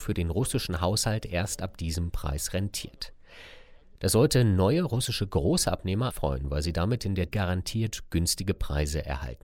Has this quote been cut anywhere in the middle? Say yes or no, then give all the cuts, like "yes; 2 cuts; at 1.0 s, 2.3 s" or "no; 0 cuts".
yes; 2 cuts; at 6.1 s, 7.3 s